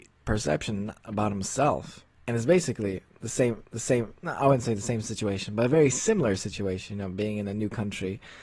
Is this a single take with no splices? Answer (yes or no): no